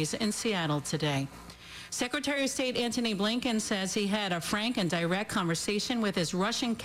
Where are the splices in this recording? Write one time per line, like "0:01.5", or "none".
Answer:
none